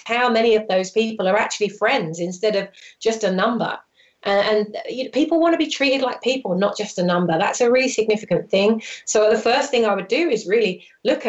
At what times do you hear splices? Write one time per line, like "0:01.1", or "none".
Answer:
none

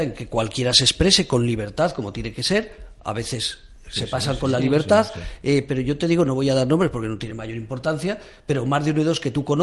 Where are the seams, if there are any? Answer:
none

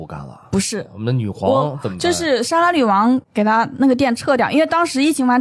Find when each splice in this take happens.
0:03.2

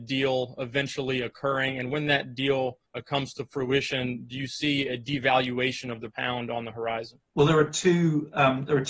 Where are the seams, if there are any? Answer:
0:02.8
0:06.1
0:07.3

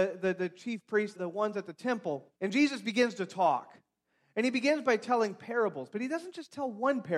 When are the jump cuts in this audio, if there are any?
0:01.1
0:02.3

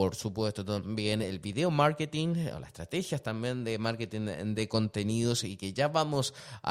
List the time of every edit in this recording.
none

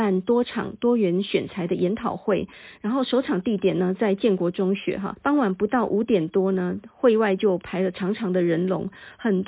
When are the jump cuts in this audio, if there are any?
0:05.2

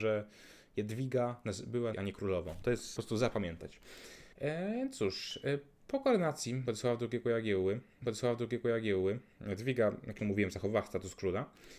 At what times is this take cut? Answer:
0:01.9
0:03.0
0:04.3
0:08.0
0:10.2

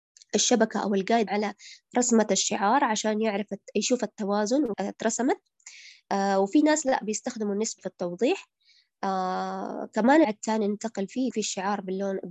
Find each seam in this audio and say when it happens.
0:01.3
0:04.7
0:07.8
0:10.2
0:11.3

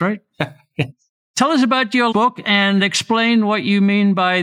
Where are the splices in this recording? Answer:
0:02.1

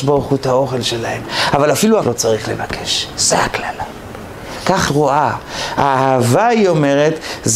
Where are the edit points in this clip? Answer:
0:02.0
0:04.9

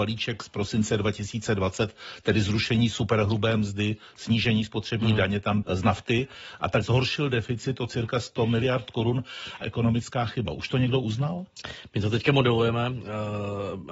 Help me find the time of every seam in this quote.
0:05.6
0:06.8
0:09.6

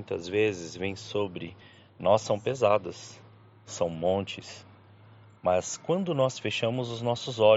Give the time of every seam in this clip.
none

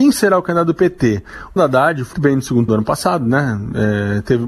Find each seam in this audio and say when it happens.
0:01.6
0:02.1
0:02.7

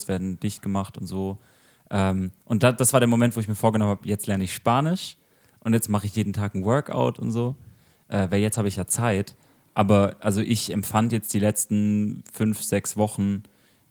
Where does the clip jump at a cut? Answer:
none

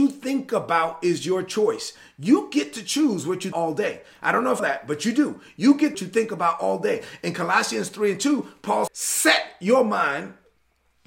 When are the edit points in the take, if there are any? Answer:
0:03.5
0:04.6
0:05.9
0:08.9

